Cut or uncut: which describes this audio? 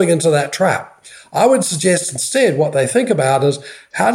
uncut